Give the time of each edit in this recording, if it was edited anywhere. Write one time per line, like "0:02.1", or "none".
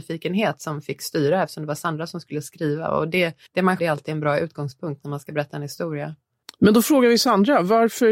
0:03.5
0:03.8